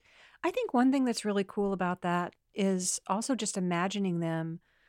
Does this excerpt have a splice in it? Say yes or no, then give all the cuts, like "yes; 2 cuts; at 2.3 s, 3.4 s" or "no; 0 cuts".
no; 0 cuts